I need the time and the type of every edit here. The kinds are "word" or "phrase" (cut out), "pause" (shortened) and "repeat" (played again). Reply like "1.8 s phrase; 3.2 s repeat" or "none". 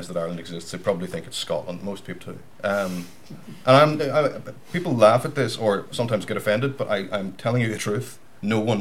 2.2 s word; 7.8 s phrase